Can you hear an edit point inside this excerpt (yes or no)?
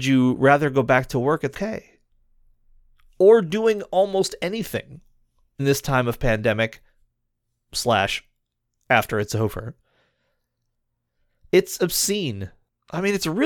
yes